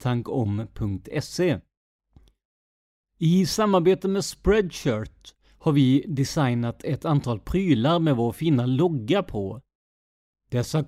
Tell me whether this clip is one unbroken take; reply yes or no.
yes